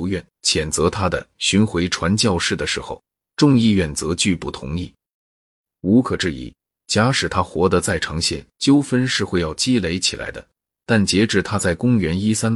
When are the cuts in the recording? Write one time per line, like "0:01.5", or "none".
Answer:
0:08.5